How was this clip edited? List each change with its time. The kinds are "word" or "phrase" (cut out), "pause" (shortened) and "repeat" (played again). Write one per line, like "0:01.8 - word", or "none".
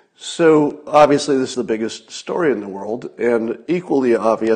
0:01.5 - word